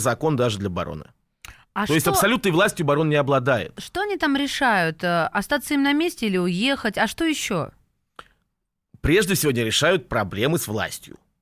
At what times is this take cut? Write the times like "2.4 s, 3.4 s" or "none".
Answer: none